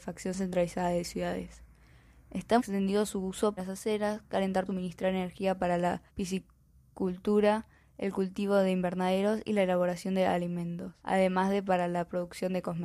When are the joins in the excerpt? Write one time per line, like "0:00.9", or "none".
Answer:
0:02.6
0:03.6
0:04.7
0:06.1
0:11.0